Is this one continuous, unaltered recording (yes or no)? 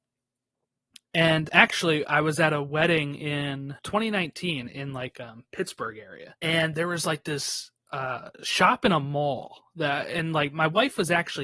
no